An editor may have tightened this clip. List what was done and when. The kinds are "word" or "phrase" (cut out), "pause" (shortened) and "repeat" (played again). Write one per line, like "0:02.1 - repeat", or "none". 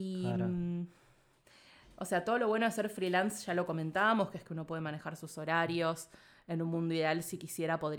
none